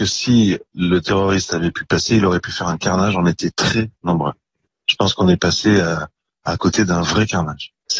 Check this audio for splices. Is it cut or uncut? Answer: uncut